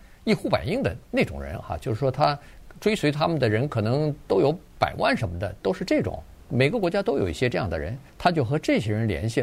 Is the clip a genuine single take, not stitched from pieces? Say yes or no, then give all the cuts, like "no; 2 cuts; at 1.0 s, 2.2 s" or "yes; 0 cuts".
no; 1 cut; at 8.1 s